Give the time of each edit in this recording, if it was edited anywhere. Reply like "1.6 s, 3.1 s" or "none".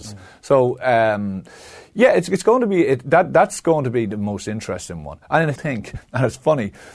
5.6 s